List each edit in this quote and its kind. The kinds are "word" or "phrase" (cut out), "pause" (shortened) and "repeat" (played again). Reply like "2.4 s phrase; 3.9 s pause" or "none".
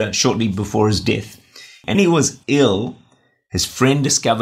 1.9 s word; 2.4 s pause